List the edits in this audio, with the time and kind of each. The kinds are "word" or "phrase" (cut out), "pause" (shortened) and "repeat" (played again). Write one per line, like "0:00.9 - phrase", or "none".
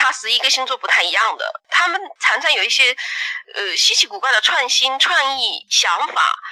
none